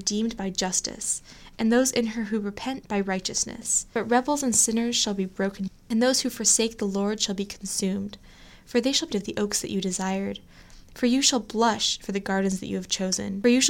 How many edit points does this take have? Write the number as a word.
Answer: two